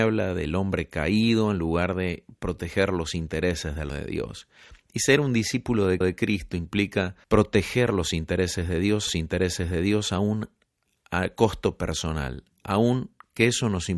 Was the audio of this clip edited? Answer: yes; 5 cuts; at 3.9 s, 6.0 s, 7.2 s, 9.1 s, 12.5 s

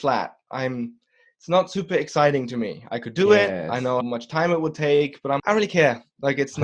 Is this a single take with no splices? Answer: no; 2 cuts; at 4.0 s, 5.4 s

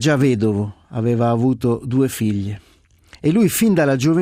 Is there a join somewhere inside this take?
no; 0 cuts

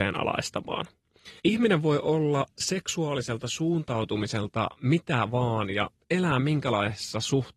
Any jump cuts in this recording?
yes; 1 cut; at 1.4 s

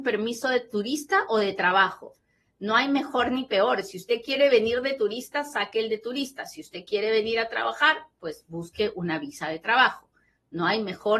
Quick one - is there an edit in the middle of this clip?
no; 0 cuts

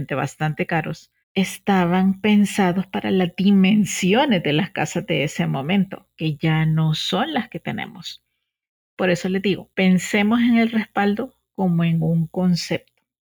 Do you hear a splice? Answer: yes; 2 cuts; at 1.2 s, 9.7 s

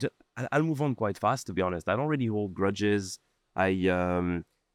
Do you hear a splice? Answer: no; 0 cuts

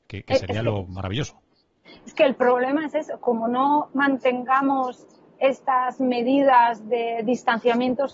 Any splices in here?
no; 0 cuts

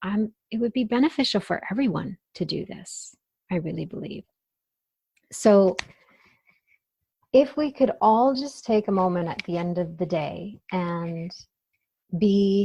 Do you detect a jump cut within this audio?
no; 0 cuts

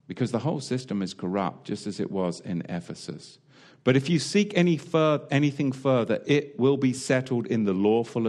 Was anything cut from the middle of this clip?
no; 0 cuts

